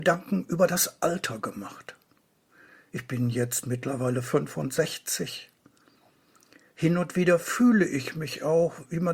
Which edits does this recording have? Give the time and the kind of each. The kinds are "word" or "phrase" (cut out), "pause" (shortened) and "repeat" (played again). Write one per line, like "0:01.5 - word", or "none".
none